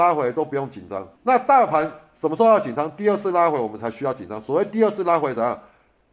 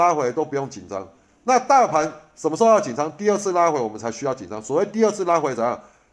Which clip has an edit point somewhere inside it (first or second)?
first